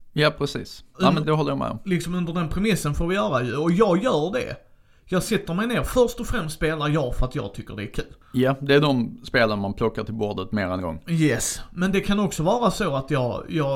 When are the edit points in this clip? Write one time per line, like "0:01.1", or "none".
0:01.2
0:10.8